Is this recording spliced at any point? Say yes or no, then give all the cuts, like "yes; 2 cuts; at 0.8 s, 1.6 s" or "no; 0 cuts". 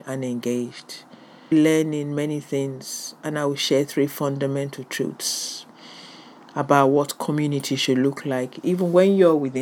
yes; 1 cut; at 1.5 s